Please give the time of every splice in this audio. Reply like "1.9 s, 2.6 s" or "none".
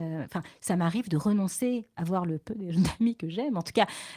2.0 s